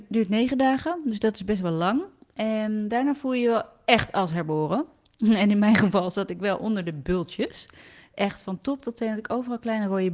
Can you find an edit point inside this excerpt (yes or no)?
no